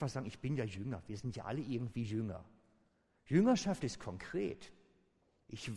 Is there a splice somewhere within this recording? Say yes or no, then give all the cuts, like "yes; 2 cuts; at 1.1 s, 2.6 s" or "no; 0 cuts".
no; 0 cuts